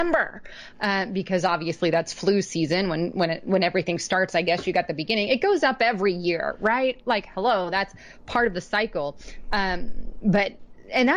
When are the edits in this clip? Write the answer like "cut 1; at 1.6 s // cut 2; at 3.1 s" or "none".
none

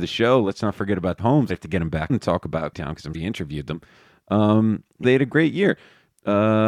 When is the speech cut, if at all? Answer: cut 1; at 1.2 s // cut 2; at 1.5 s // cut 3; at 2.1 s // cut 4; at 2.7 s // cut 5; at 3.1 s // cut 6; at 5.0 s

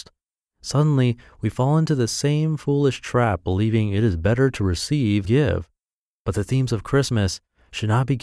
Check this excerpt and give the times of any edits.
cut 1; at 5.2 s

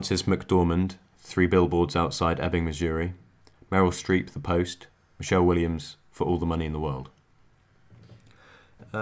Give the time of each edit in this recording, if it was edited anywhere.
none

